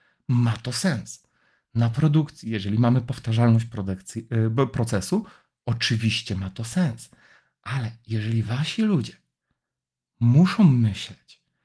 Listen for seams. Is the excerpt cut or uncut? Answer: uncut